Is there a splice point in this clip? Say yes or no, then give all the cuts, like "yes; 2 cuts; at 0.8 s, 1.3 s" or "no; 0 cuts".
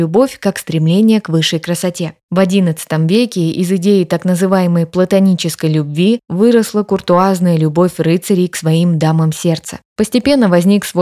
no; 0 cuts